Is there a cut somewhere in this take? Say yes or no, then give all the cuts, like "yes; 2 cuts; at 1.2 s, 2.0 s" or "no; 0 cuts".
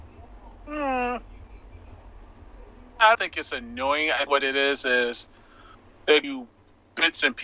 yes; 3 cuts; at 3.1 s, 4.3 s, 6.2 s